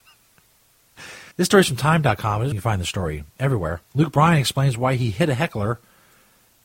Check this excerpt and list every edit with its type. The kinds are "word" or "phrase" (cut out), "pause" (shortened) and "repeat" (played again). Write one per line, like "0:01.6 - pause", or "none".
0:01.3 - pause
0:02.5 - word
0:03.9 - pause